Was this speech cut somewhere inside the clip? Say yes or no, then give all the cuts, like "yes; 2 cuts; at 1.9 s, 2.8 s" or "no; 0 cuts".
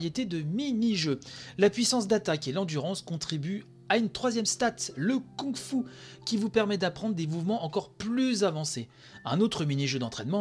no; 0 cuts